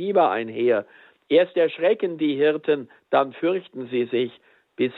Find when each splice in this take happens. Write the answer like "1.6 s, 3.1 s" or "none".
none